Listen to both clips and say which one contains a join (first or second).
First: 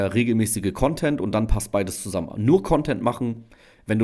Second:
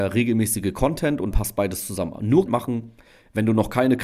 second